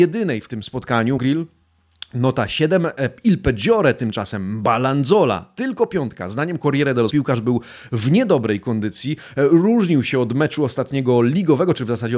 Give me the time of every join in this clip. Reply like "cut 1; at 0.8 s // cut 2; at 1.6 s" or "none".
cut 1; at 1.2 s // cut 2; at 7.1 s